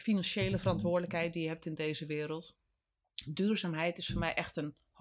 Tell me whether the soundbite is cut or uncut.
uncut